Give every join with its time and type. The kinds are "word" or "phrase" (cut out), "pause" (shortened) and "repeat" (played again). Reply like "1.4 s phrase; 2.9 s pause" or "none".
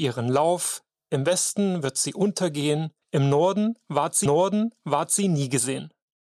3.0 s pause; 4.3 s repeat